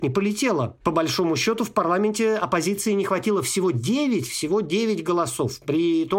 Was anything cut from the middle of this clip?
no; 0 cuts

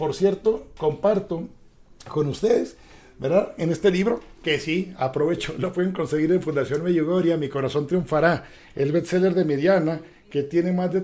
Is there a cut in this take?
no; 0 cuts

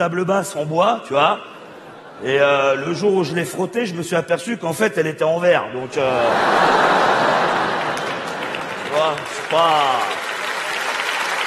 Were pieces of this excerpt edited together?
no; 0 cuts

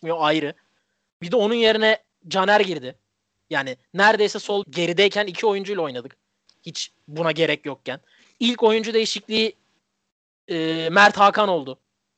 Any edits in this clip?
yes; 2 cuts; at 4.6 s, 7.0 s

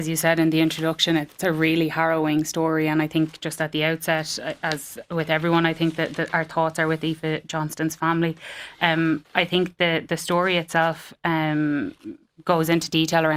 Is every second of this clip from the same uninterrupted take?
yes; 0 cuts

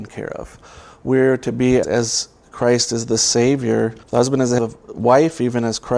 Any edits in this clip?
yes; 3 cuts; at 1.8 s, 4.0 s, 4.6 s

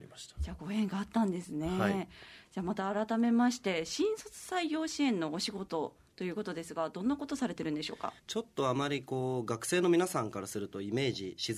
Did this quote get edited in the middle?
yes; 1 cut; at 8.2 s

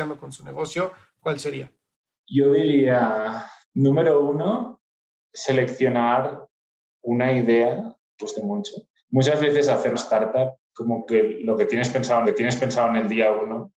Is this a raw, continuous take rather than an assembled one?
no; 6 cuts; at 3.6 s, 8.2 s, 9.0 s, 9.9 s, 10.6 s, 12.2 s

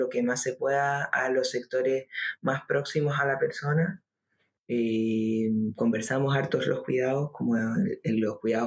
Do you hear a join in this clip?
no; 0 cuts

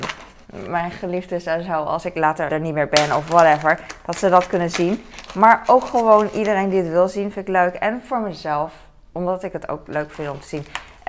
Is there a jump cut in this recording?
yes; 1 cut; at 2.5 s

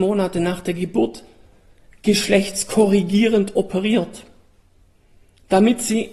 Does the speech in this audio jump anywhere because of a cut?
no; 0 cuts

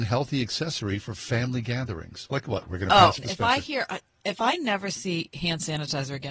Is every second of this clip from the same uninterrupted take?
no; 1 cut; at 3.2 s

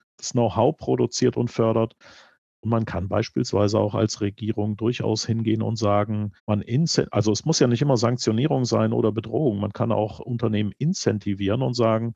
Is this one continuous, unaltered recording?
no; 1 cut; at 6.4 s

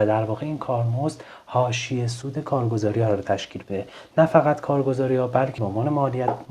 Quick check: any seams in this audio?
yes; 1 cut; at 5.6 s

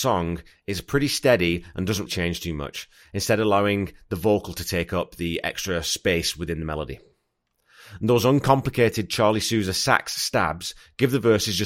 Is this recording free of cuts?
no; 1 cut; at 2.1 s

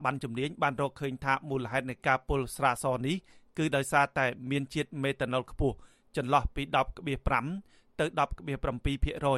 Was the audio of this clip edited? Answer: no; 0 cuts

